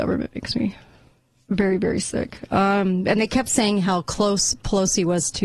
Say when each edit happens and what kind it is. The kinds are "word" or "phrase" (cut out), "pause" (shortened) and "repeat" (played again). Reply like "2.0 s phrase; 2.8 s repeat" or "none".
none